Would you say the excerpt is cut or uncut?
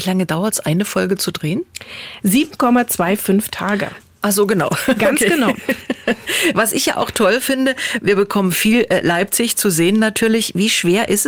uncut